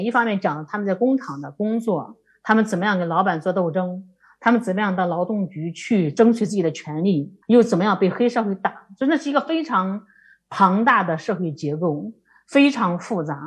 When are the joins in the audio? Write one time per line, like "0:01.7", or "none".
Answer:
0:07.4